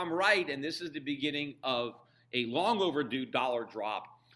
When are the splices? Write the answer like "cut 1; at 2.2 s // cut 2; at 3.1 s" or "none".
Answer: none